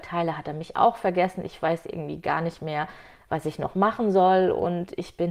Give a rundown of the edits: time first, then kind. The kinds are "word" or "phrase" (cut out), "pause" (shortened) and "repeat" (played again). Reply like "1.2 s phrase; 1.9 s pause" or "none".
none